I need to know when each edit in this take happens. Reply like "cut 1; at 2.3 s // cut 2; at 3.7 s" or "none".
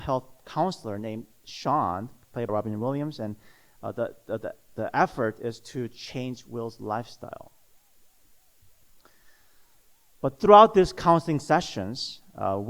cut 1; at 2.5 s